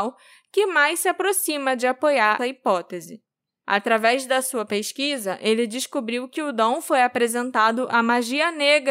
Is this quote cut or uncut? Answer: cut